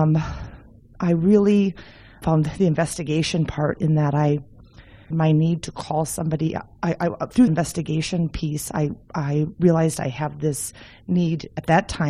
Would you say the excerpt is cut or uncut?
cut